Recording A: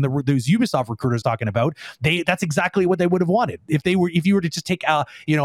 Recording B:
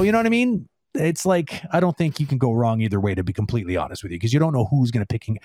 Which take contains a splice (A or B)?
A